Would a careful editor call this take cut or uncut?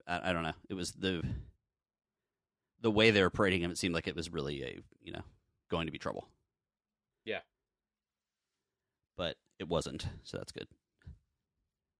uncut